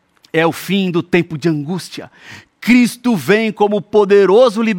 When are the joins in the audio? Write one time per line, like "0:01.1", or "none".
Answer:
none